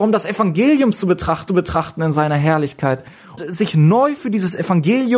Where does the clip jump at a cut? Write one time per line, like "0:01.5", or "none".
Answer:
0:01.5
0:03.4